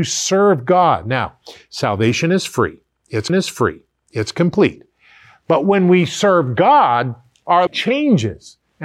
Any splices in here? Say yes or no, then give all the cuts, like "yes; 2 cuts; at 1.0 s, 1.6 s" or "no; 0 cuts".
yes; 2 cuts; at 3.3 s, 7.7 s